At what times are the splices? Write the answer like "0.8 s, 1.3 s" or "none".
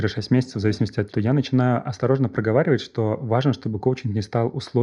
1.1 s